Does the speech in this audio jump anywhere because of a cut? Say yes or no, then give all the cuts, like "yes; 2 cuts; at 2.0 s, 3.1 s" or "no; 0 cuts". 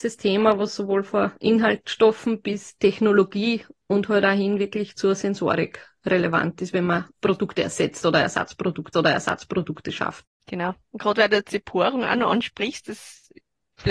yes; 2 cuts; at 7.1 s, 8.9 s